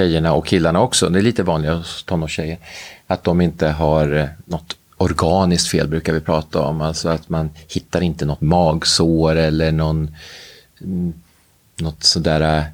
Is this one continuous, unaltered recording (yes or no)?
yes